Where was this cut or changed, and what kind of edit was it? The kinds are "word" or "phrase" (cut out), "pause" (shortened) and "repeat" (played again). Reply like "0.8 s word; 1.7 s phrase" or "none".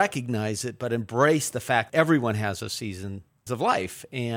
1.9 s word; 3.5 s word